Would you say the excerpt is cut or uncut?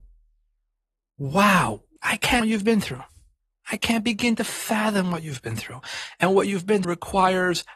cut